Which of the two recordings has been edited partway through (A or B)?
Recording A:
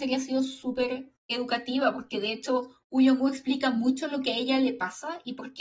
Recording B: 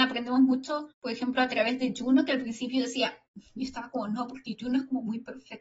B